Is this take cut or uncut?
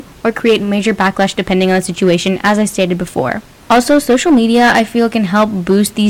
uncut